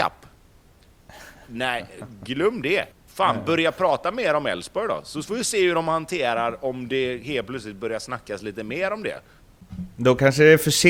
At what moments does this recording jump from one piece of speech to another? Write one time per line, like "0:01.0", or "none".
0:02.9